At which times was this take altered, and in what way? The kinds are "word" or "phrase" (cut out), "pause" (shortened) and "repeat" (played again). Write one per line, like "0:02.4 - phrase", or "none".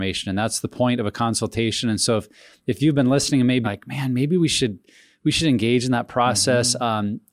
0:03.6 - word